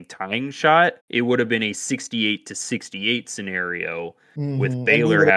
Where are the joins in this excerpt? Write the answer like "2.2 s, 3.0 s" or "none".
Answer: 1.0 s

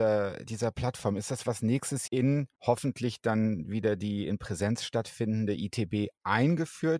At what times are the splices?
1.4 s, 2.1 s, 2.6 s

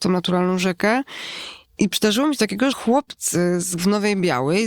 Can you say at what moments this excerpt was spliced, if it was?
1.6 s, 2.4 s, 2.7 s, 3.8 s

